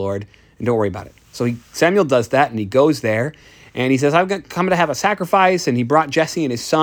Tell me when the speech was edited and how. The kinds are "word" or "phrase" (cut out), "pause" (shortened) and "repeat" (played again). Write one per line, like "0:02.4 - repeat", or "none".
none